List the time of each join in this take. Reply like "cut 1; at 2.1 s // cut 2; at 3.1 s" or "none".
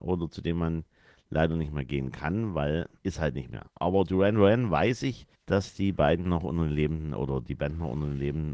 cut 1; at 3.0 s // cut 2; at 5.3 s